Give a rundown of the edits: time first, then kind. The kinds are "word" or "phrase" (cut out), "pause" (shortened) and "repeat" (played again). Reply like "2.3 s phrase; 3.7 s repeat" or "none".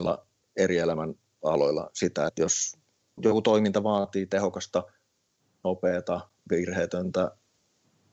2.3 s word; 3.2 s word